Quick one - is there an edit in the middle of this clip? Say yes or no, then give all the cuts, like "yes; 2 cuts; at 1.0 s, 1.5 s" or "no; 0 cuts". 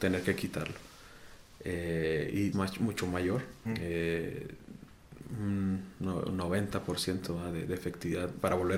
yes; 2 cuts; at 2.5 s, 3.6 s